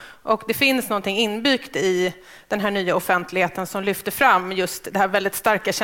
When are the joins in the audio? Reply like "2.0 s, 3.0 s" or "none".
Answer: none

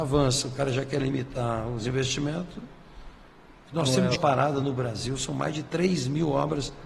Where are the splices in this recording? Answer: 4.2 s

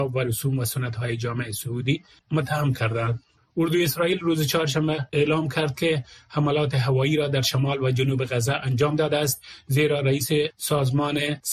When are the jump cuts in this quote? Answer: none

